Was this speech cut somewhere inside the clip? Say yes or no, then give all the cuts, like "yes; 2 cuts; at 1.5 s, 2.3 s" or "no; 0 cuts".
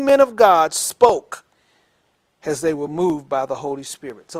no; 0 cuts